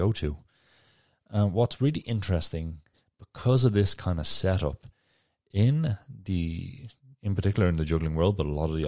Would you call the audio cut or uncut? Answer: uncut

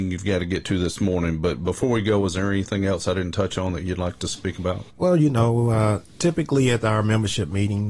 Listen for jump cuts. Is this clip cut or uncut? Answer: cut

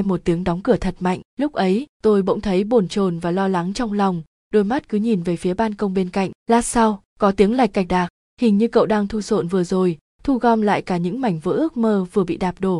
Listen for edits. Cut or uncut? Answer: cut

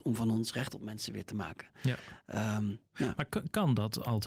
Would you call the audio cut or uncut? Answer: uncut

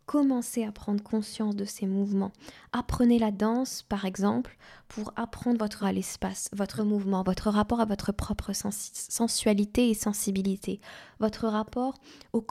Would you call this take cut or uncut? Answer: cut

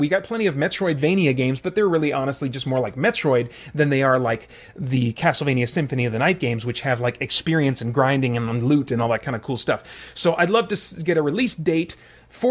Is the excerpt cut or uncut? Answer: uncut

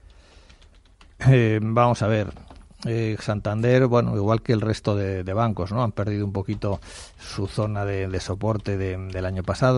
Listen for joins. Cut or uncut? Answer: uncut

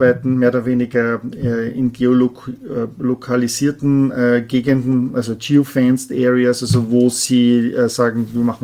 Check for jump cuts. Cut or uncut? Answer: uncut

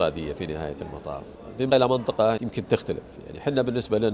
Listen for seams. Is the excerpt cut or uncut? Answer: cut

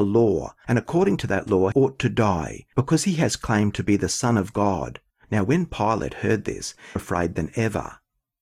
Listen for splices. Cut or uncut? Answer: cut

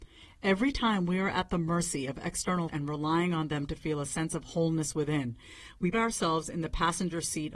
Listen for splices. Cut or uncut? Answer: cut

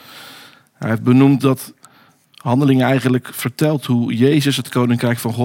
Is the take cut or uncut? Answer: uncut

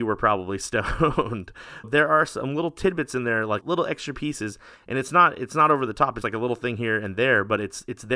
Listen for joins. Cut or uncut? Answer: cut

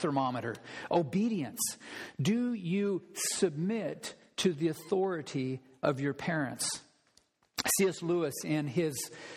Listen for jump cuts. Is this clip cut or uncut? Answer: uncut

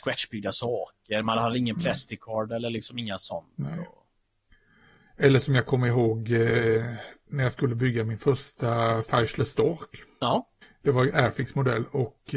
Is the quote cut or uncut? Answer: cut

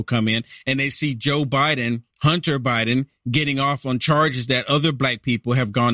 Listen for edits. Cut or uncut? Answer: cut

